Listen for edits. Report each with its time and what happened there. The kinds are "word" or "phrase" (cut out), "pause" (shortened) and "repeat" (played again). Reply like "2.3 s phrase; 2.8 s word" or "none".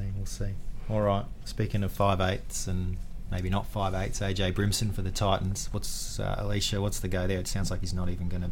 none